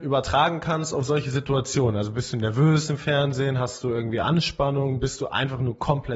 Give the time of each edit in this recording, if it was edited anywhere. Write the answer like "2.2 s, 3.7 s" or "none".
none